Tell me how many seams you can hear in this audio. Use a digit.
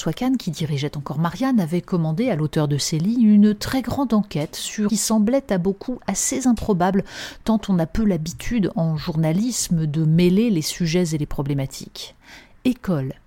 1